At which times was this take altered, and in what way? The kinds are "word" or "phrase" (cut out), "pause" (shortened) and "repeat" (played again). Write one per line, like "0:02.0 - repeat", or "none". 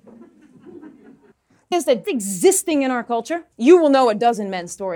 0:01.7 - word
0:02.0 - word
0:03.5 - pause